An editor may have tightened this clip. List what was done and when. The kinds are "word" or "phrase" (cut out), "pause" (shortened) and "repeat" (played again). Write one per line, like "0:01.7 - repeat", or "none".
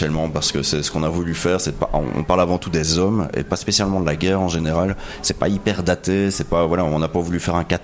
none